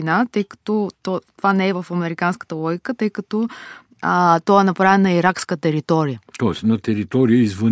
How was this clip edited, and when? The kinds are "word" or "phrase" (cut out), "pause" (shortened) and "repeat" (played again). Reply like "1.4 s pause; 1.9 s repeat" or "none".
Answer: 0.9 s pause; 6.3 s pause